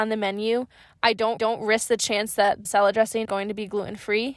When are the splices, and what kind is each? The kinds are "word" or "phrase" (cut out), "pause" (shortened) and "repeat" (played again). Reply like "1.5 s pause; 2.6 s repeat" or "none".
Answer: 1.4 s repeat; 2.6 s word; 3.2 s word